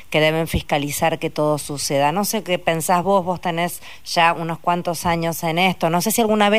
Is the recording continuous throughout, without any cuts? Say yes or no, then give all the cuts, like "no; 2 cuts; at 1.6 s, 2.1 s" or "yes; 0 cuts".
yes; 0 cuts